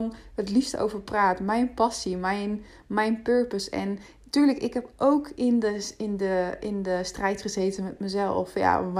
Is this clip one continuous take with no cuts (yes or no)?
yes